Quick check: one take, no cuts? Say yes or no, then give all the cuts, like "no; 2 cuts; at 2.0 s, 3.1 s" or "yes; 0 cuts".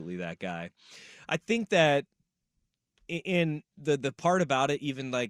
yes; 0 cuts